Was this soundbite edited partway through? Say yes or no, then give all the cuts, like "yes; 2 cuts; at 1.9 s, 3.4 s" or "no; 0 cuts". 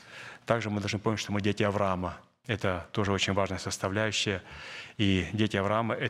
no; 0 cuts